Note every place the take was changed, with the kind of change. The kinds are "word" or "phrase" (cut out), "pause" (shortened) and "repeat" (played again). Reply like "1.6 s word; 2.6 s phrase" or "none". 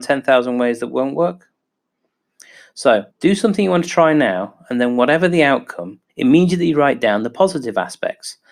3.1 s pause; 6.1 s pause